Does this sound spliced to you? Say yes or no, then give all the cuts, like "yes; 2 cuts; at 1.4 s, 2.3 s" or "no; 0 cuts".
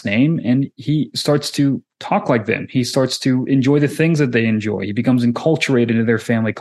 no; 0 cuts